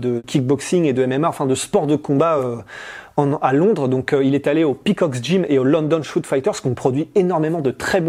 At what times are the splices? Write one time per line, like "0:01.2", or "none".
none